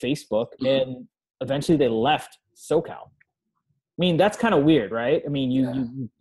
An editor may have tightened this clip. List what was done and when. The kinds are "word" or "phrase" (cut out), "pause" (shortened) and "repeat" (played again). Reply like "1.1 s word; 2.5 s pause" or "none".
none